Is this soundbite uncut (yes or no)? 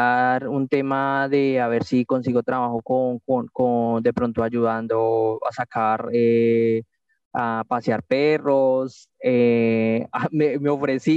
yes